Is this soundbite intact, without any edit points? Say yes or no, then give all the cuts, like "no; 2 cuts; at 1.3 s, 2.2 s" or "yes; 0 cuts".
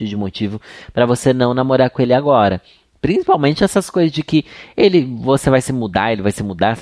yes; 0 cuts